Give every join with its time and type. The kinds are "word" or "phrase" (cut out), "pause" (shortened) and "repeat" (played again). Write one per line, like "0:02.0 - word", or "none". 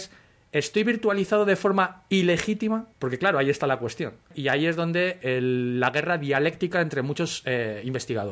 0:02.9 - pause